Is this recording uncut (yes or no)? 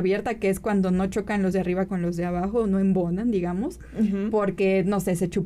no